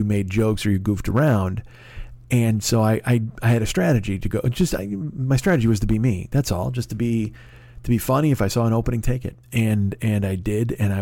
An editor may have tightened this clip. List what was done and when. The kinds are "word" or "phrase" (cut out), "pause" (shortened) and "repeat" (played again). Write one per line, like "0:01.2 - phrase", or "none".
0:09.4 - pause